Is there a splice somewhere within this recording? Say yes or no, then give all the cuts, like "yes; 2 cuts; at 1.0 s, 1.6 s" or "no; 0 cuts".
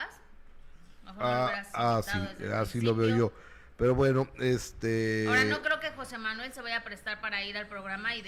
no; 0 cuts